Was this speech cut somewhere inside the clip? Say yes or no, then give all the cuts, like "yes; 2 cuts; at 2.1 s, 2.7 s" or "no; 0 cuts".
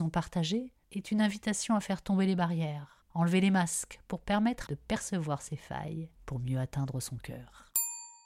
yes; 2 cuts; at 4.7 s, 6.2 s